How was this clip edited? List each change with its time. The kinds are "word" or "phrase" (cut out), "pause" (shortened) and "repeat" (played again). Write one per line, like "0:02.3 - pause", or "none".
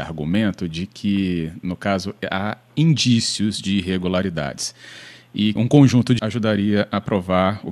0:05.6 - word
0:06.2 - word